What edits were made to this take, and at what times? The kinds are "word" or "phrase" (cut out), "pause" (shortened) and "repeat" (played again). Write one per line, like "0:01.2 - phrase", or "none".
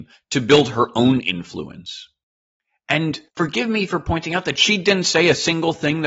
0:03.3 - pause